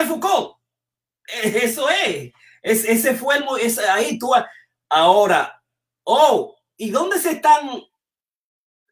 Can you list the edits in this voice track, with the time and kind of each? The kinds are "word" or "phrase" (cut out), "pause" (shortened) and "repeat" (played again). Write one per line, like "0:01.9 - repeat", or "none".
none